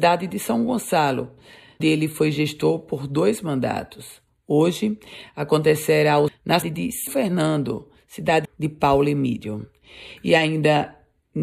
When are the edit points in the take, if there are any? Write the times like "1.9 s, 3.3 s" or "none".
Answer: 1.8 s, 6.3 s, 6.6 s, 7.1 s, 8.4 s